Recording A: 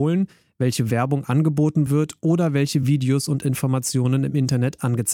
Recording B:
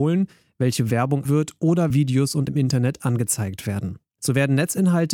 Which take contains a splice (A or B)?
B